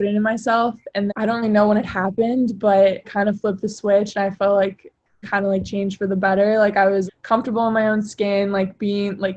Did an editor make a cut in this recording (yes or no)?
yes